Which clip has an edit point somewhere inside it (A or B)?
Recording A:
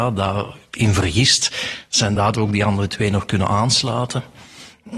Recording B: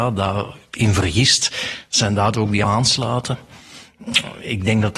B